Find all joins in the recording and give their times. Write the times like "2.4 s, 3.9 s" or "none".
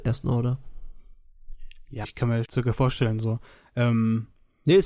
2.0 s, 2.4 s